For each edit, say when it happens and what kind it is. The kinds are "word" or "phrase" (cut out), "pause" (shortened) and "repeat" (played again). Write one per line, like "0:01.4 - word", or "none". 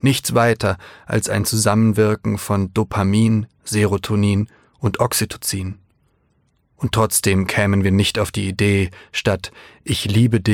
none